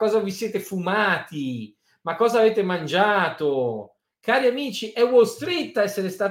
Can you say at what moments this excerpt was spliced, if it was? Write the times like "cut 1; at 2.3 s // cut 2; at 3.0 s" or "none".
none